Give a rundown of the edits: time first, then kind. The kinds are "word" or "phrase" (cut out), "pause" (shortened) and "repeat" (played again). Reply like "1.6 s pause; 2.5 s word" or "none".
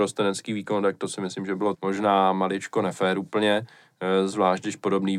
1.7 s word